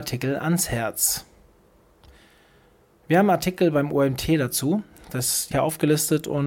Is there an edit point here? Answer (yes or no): yes